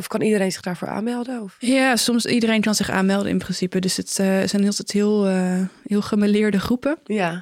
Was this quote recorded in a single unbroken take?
yes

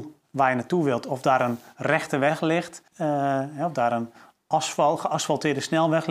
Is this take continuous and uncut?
no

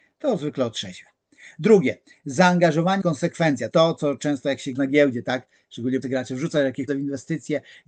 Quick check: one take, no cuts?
no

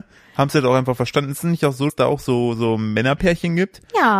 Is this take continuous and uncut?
no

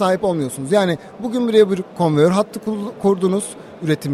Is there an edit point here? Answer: no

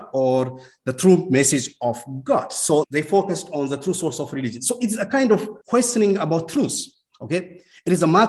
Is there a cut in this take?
yes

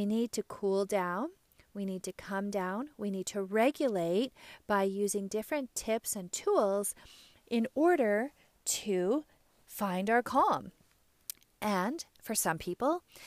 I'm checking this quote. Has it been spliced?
no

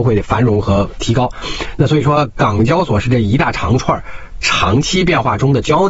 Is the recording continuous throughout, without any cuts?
yes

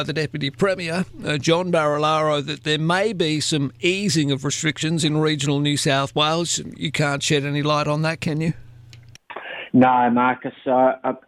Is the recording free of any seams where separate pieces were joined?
yes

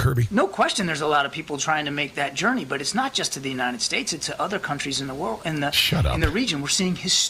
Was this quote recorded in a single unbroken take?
yes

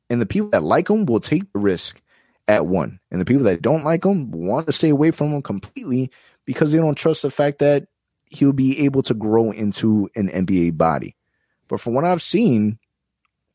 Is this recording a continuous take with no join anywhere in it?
yes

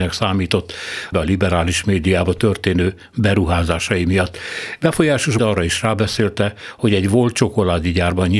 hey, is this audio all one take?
no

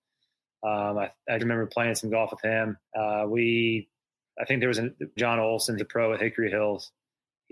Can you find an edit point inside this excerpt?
yes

